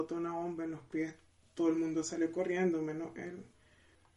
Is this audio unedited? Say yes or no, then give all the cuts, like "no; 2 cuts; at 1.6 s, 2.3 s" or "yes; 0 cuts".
yes; 0 cuts